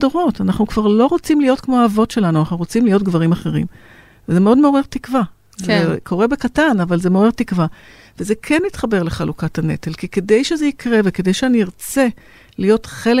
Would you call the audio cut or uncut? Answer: uncut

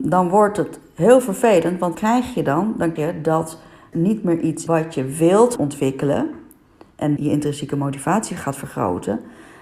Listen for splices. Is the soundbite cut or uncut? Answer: cut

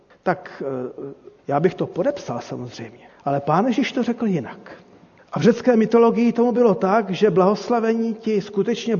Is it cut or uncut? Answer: uncut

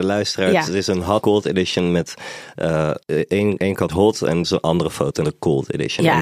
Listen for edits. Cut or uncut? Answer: cut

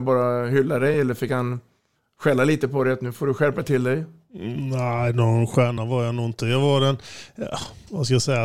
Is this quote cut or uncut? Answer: uncut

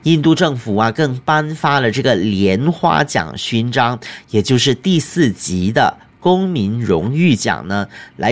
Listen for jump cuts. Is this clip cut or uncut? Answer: uncut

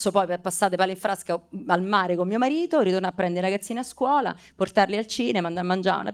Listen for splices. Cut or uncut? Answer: uncut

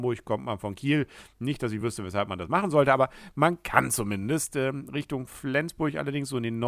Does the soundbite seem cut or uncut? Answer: uncut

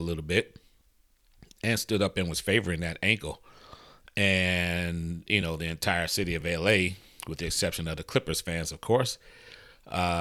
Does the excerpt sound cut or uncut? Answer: uncut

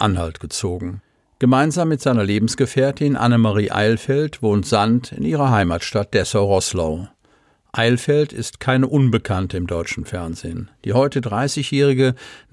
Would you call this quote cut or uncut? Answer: uncut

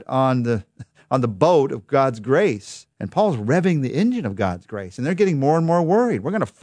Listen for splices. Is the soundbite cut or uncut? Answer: cut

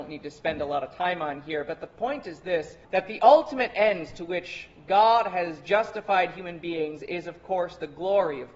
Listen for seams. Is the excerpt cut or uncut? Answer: cut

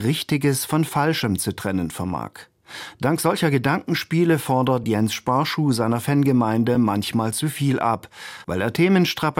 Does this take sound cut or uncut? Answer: uncut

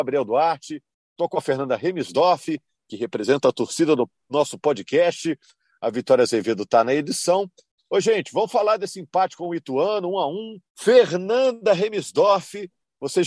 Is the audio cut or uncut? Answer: cut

